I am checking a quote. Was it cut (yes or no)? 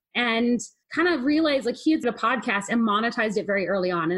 yes